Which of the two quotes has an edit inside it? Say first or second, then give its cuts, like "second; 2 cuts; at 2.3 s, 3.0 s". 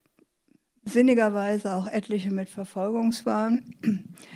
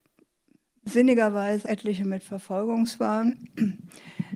second; 1 cut; at 1.6 s